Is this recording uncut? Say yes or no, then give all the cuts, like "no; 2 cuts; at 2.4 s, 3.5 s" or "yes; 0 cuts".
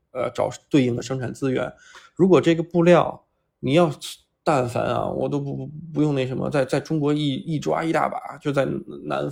yes; 0 cuts